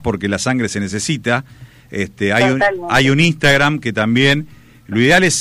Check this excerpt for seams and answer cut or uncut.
uncut